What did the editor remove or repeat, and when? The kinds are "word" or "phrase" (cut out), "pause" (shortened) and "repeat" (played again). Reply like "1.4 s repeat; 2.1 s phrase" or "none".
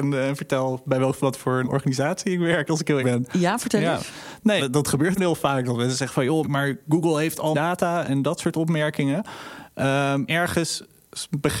1.6 s word; 3.0 s word; 4.6 s word; 5.2 s word; 6.4 s word; 7.5 s word; 8.1 s word; 10.3 s word